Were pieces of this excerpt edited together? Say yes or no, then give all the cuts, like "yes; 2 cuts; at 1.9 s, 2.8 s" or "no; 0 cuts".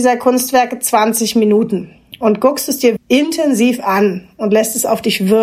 yes; 1 cut; at 3.0 s